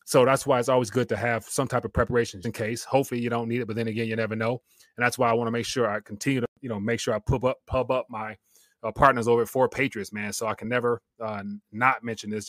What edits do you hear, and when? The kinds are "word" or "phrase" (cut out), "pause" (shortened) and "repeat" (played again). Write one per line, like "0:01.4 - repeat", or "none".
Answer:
0:02.4 - word